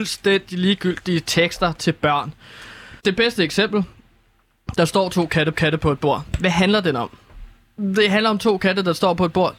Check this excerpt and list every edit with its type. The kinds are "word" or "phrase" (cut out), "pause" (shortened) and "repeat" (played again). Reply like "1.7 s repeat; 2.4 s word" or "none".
3.0 s pause; 5.5 s repeat